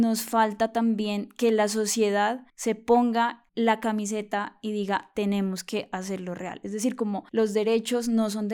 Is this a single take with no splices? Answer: no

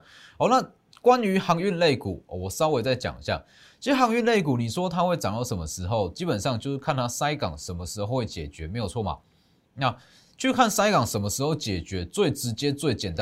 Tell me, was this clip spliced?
no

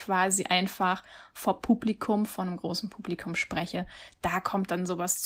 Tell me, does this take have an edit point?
no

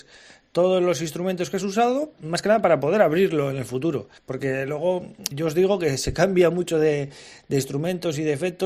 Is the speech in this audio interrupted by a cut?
yes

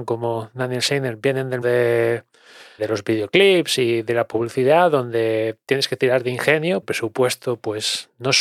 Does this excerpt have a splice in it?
yes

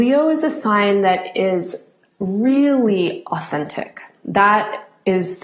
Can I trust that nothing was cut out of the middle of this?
yes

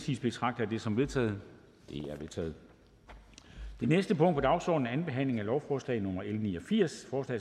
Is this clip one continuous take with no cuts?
yes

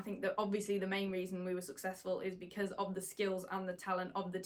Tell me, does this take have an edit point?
no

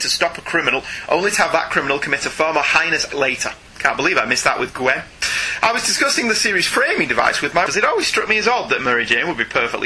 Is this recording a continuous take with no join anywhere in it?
no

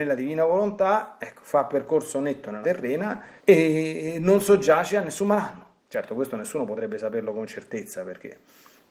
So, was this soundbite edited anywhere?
yes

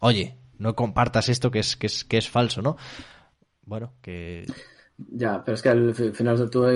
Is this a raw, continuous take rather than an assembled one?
yes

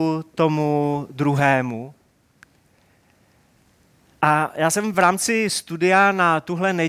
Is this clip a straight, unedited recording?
yes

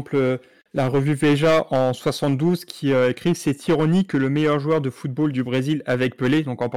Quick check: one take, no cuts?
yes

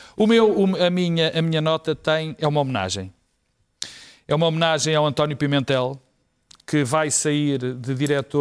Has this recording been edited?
no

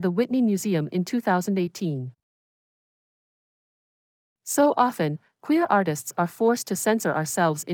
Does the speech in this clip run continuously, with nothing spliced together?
yes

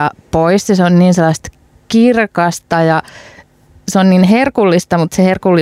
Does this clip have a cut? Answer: no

